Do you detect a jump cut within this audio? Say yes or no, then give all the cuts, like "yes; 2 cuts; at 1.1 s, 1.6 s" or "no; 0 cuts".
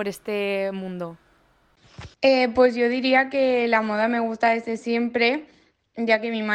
yes; 1 cut; at 2.1 s